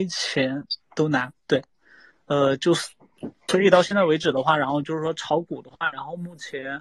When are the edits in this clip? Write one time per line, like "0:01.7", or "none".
none

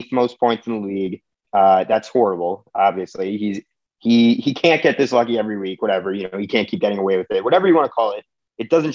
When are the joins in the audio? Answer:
none

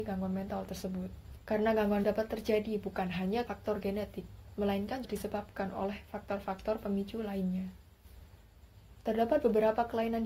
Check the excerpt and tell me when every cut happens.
0:02.0
0:03.5
0:05.0

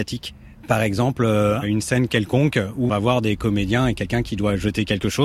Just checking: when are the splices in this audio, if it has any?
0:02.9

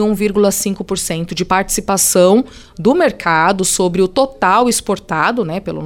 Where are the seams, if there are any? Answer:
none

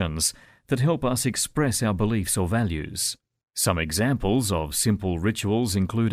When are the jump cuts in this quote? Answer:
none

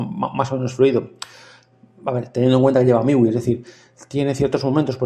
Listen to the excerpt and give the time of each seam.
none

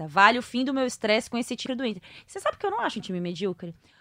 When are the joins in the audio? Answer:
0:01.7
0:03.0

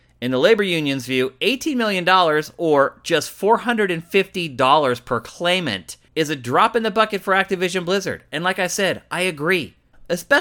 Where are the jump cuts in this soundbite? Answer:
0:06.1

